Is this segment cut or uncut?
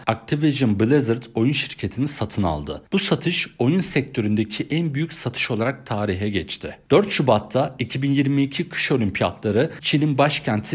uncut